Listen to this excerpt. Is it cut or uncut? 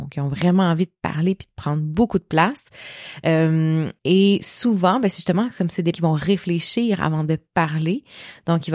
cut